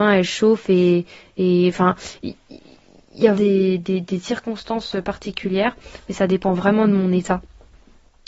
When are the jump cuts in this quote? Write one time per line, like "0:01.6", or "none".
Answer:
0:03.4